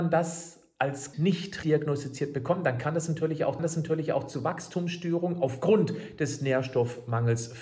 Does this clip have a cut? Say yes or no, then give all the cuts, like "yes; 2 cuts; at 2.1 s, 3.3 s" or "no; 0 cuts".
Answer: yes; 3 cuts; at 1.1 s, 1.6 s, 3.6 s